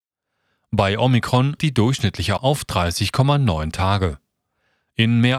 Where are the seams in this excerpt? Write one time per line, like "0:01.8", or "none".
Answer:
0:01.6
0:02.4